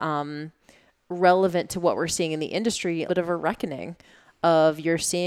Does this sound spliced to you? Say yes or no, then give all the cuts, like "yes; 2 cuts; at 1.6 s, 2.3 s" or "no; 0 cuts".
yes; 1 cut; at 3.1 s